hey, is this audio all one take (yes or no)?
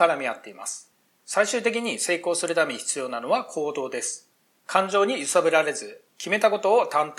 yes